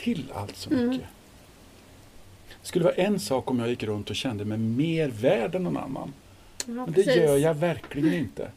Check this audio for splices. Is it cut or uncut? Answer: uncut